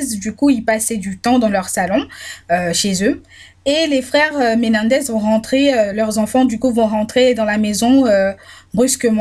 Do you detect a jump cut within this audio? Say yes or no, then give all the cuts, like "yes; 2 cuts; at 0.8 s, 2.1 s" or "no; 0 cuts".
no; 0 cuts